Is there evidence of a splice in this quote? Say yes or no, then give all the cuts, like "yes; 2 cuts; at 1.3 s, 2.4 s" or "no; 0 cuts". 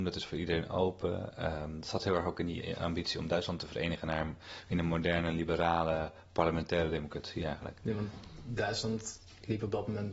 no; 0 cuts